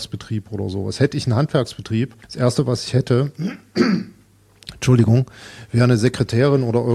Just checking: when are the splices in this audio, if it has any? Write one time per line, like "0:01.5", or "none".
0:02.2